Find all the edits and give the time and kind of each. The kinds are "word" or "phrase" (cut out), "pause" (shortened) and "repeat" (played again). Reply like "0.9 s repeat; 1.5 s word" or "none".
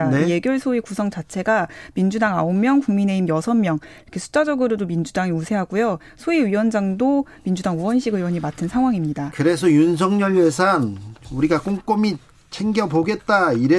none

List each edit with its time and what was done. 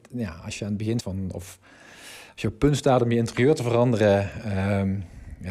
1.0 s word

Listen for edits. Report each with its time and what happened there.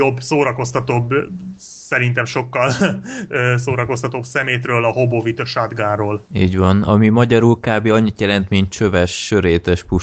6.3 s pause

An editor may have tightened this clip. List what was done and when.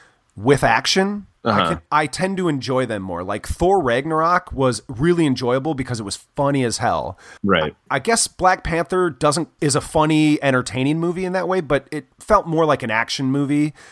1.4 s pause; 7.4 s pause; 9.6 s word

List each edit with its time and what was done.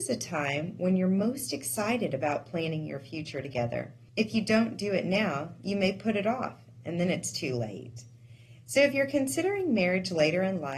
4.1 s pause

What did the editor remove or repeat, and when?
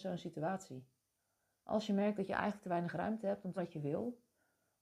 3.6 s word

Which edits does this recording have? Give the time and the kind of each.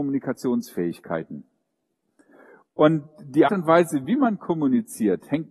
3.5 s word

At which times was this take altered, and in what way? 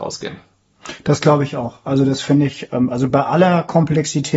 none

